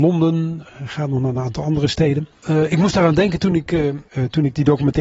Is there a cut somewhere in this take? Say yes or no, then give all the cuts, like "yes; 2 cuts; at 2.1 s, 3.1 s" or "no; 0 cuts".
no; 0 cuts